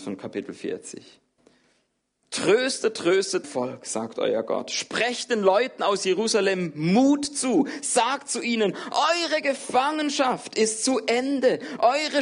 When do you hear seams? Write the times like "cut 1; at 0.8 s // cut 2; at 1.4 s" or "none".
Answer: cut 1; at 3.4 s